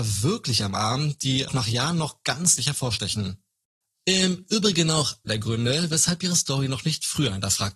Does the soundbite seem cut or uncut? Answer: cut